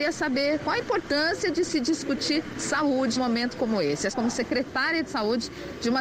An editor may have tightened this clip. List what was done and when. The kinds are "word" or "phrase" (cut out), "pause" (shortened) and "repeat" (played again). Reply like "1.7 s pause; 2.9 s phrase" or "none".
3.2 s word; 4.1 s word

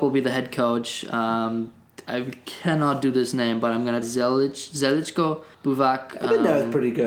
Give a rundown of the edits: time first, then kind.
4.0 s word; 5.5 s pause

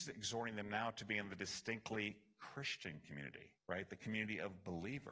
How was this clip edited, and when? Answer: 3.6 s pause

